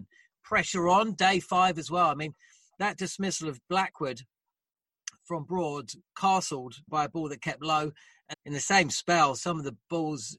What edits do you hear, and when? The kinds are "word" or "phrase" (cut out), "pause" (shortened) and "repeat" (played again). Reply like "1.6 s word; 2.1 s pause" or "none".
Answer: 6.9 s word; 8.3 s word